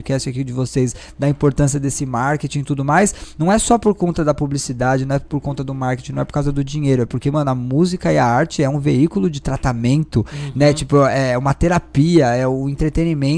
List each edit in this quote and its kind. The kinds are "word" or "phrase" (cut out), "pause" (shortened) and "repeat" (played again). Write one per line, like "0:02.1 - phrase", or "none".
none